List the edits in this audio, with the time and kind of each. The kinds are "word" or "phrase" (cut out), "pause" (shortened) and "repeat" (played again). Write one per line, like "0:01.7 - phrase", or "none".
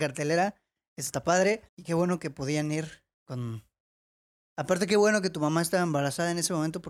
0:01.7 - pause
0:03.1 - pause